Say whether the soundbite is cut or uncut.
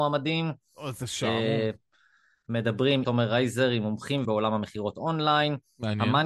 cut